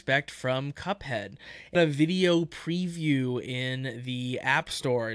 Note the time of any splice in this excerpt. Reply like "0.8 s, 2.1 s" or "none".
1.7 s